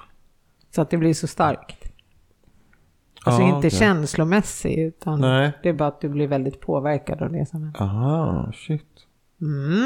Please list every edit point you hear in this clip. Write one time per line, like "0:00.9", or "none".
none